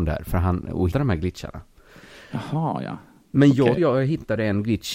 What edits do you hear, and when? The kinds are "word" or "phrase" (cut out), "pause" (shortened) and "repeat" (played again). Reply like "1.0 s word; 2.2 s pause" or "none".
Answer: 0.9 s word; 3.8 s word